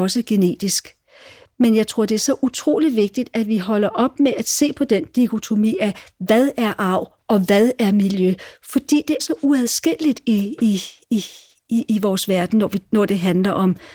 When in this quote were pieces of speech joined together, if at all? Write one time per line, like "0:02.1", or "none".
0:09.2